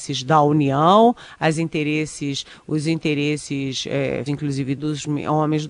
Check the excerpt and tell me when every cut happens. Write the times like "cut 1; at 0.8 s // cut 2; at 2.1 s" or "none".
cut 1; at 4.3 s // cut 2; at 4.8 s